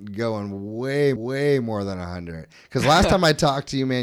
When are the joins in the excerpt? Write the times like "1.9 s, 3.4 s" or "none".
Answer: 1.2 s